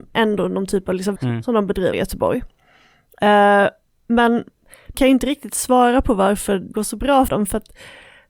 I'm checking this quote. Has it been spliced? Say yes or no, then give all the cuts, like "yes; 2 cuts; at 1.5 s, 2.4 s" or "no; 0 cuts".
yes; 5 cuts; at 1.2 s, 1.9 s, 4.9 s, 6.7 s, 7.3 s